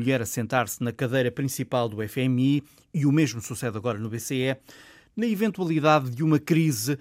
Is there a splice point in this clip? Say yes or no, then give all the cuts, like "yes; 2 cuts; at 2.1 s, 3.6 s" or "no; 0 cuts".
no; 0 cuts